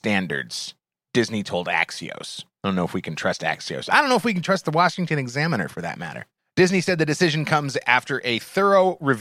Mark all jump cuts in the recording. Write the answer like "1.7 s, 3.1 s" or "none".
2.5 s, 6.4 s

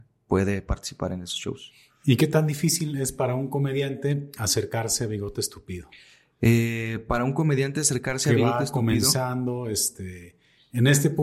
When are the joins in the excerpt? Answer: none

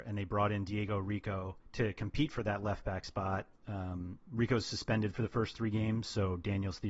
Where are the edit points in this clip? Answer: 1.6 s

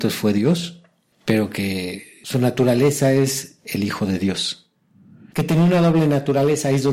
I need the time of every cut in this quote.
none

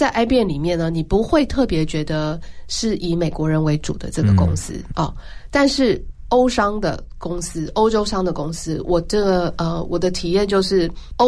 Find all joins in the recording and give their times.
4.9 s

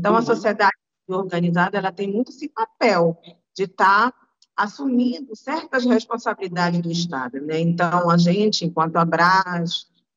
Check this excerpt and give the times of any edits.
none

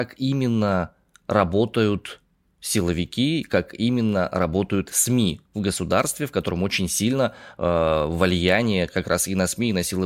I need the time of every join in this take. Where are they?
none

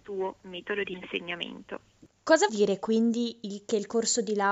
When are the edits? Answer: 2.5 s

